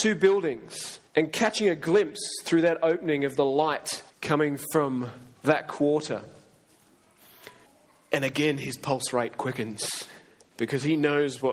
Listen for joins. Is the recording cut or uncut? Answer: cut